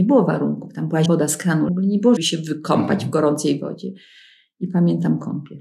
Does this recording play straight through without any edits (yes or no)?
no